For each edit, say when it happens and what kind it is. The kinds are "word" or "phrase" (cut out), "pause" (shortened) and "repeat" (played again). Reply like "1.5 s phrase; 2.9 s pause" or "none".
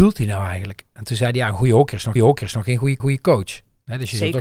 2.2 s repeat; 3.0 s repeat